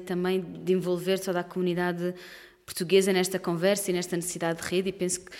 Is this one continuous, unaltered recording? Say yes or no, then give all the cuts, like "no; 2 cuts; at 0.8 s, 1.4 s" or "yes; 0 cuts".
yes; 0 cuts